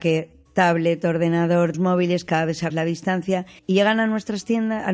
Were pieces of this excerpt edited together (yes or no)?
yes